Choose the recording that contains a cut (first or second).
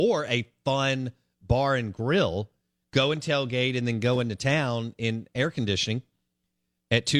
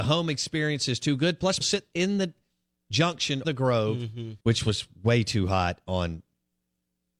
second